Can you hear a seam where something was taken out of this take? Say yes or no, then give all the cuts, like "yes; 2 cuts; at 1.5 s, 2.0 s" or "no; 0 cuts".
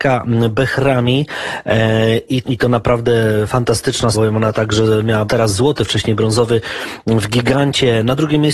yes; 3 cuts; at 2.4 s, 4.1 s, 5.3 s